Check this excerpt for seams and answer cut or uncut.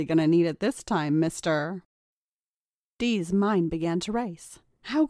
cut